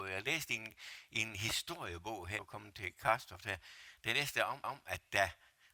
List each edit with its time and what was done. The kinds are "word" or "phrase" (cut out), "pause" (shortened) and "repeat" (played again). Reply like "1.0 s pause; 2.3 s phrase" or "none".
2.4 s word; 4.6 s repeat